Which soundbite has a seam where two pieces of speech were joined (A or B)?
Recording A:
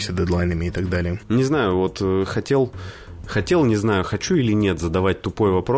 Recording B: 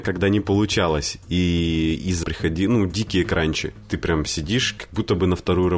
B